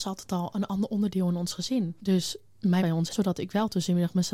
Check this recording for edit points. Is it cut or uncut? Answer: cut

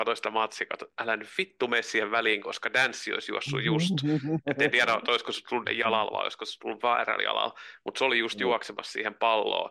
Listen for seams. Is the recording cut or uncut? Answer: cut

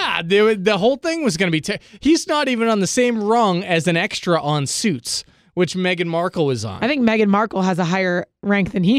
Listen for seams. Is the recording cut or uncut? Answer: uncut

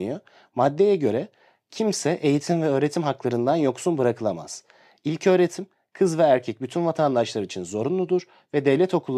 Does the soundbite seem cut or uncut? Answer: uncut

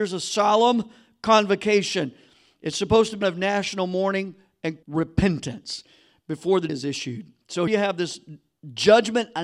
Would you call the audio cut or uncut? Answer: cut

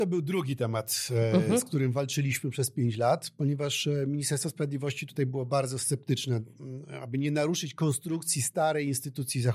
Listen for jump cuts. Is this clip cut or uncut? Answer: uncut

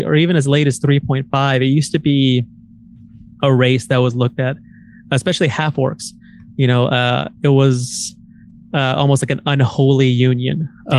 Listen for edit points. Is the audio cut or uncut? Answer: uncut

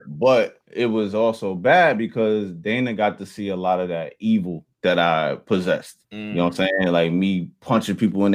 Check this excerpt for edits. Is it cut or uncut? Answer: cut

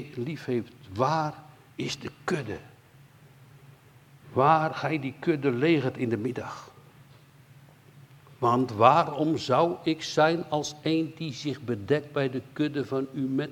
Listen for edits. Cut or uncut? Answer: uncut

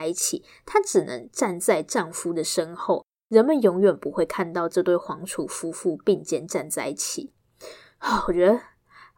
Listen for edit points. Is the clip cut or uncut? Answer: uncut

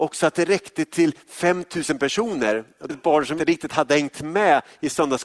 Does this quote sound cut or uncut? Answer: cut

